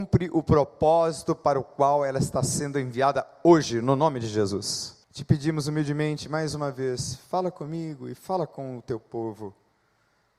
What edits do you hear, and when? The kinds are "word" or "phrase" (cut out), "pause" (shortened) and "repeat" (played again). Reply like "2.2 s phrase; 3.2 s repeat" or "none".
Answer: 5.0 s pause